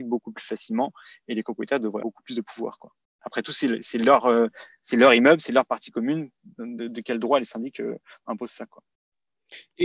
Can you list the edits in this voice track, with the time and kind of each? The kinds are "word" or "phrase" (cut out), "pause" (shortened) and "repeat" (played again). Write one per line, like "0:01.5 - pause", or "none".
0:02.0 - word